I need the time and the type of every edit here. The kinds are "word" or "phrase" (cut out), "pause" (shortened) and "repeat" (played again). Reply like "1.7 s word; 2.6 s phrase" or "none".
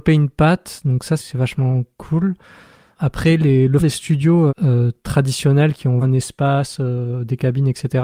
1.2 s word; 3.8 s word; 4.5 s word; 6.0 s word